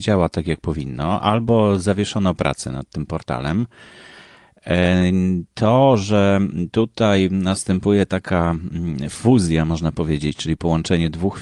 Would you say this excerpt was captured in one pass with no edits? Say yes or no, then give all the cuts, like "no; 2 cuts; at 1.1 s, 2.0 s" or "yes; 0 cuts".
yes; 0 cuts